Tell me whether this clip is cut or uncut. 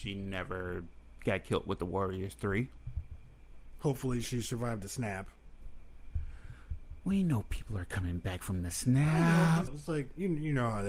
cut